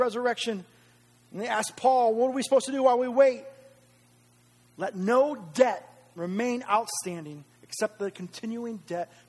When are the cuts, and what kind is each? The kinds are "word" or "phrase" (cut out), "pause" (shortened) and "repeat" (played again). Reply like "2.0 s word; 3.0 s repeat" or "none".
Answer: none